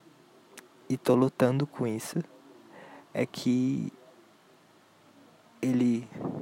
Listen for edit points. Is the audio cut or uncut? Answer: uncut